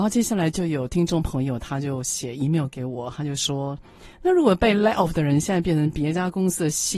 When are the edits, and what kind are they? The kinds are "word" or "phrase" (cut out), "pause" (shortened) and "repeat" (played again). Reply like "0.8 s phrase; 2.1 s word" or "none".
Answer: 4.1 s pause